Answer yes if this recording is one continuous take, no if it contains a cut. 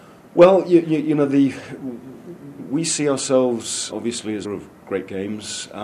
no